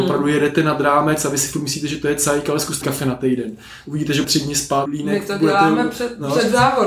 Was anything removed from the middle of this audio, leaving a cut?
yes; 3 cuts; at 2.8 s, 4.2 s, 4.9 s

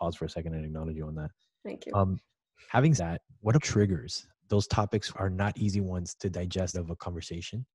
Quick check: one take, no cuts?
no; 6 cuts; at 3.0 s, 3.6 s, 4.3 s, 5.1 s, 6.1 s, 6.7 s

